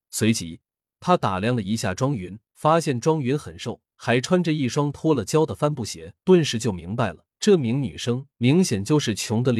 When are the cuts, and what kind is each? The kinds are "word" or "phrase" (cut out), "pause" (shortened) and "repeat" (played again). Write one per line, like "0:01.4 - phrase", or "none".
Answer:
0:02.4 - pause
0:03.9 - pause
0:06.2 - pause
0:07.3 - pause
0:08.3 - pause

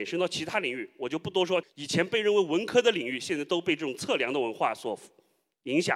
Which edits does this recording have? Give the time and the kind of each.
0:01.6 - phrase

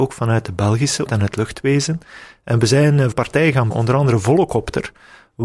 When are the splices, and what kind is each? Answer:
0:01.1 - word
0:03.1 - word
0:03.7 - word

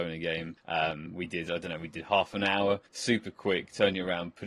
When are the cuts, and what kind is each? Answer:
none

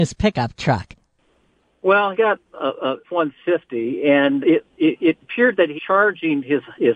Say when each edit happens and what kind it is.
0:02.1 - word
0:02.5 - word
0:03.0 - word
0:04.4 - word
0:05.2 - word
0:05.8 - word

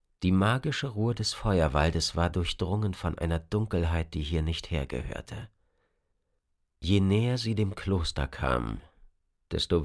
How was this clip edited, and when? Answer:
none

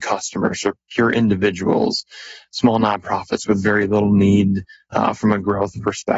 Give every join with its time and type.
none

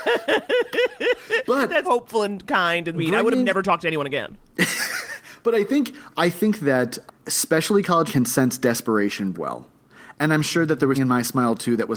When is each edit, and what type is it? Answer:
0:01.8 - word
0:02.9 - word
0:07.1 - word
0:08.1 - word
0:09.3 - word
0:10.9 - word

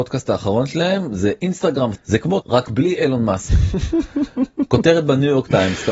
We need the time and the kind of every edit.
0:02.0 - word
0:02.4 - word

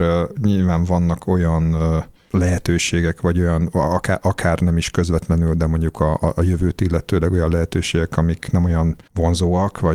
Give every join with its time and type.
none

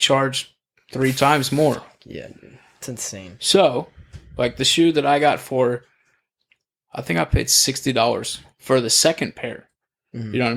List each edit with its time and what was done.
none

